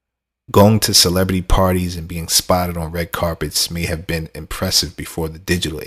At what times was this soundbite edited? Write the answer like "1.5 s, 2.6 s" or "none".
none